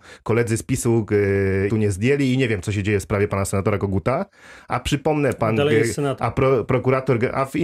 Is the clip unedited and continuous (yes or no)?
no